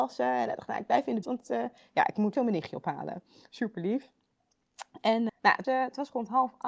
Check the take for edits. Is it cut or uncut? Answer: cut